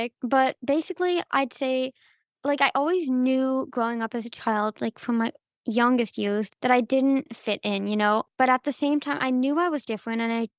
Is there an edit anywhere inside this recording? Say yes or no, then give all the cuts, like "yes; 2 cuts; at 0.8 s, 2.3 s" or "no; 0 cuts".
no; 0 cuts